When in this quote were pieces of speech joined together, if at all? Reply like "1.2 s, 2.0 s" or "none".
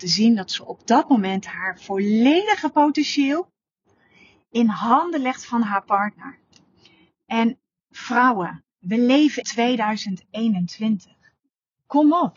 9.4 s